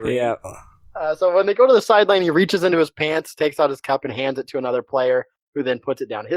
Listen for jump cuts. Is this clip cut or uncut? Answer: uncut